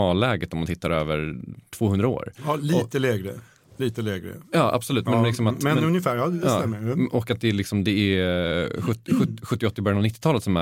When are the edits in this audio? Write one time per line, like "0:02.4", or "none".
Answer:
none